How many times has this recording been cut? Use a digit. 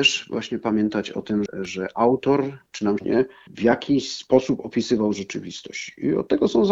3